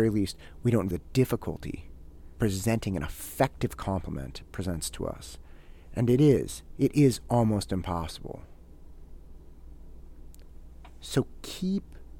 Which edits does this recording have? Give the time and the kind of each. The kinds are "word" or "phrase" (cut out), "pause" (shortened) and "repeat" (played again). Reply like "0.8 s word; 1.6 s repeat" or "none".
0.9 s word; 2.4 s word